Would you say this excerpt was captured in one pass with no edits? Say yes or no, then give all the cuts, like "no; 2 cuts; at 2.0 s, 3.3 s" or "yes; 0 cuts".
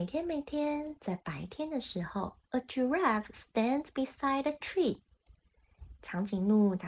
no; 1 cut; at 2.4 s